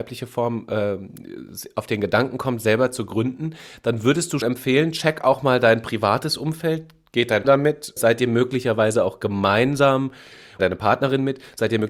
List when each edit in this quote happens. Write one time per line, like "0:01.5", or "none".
0:04.4
0:07.4
0:08.0
0:10.6